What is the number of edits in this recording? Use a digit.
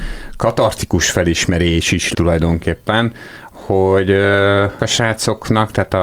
2